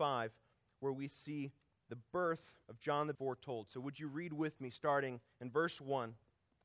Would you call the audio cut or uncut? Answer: cut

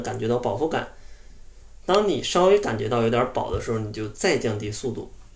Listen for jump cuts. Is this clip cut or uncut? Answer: uncut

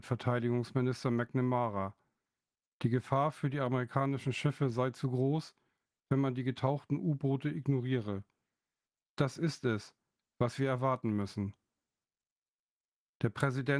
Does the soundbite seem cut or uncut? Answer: uncut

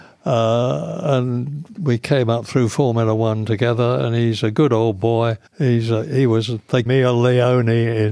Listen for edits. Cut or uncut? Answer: cut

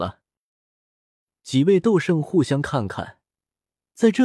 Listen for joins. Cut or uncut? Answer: uncut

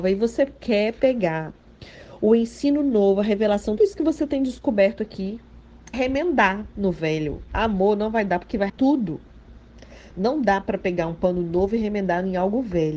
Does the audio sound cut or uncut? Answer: cut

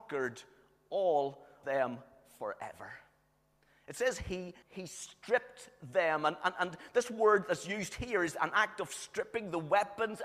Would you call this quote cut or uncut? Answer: cut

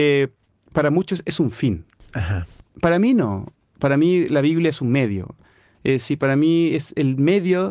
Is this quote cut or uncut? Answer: uncut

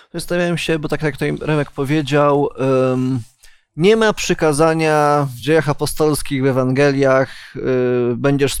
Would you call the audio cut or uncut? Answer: uncut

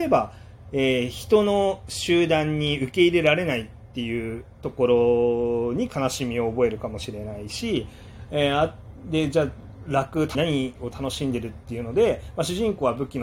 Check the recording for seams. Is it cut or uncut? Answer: cut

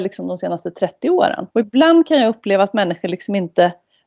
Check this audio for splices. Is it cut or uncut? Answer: cut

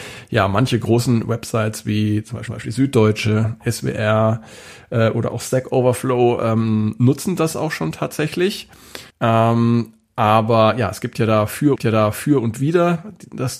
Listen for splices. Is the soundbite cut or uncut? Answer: cut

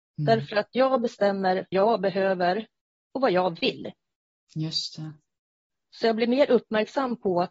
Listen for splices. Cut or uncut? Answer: cut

